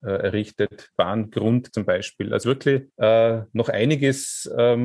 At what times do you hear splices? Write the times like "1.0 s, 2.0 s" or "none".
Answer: 1.0 s, 1.7 s, 2.4 s, 2.9 s